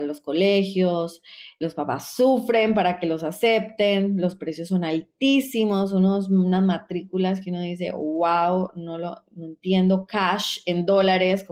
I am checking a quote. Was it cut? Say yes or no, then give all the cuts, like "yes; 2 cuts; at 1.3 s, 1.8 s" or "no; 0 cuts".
yes; 1 cut; at 1.6 s